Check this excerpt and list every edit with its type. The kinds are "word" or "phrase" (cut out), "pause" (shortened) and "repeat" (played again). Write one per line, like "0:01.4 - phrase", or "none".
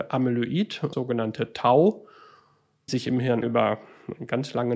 0:00.9 - phrase
0:02.9 - word
0:03.4 - word